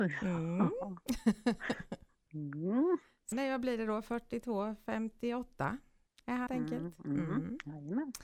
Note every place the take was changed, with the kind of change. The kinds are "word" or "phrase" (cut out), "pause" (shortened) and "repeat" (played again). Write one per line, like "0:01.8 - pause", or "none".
0:03.3 - word
0:06.1 - pause
0:06.5 - word